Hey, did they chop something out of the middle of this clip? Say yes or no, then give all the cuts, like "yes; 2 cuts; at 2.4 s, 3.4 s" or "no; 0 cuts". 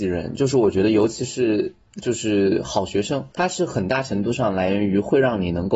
yes; 1 cut; at 3.3 s